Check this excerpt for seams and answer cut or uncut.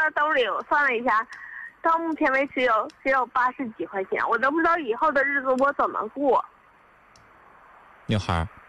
uncut